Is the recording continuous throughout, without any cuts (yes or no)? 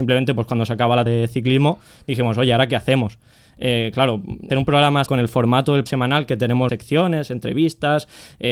no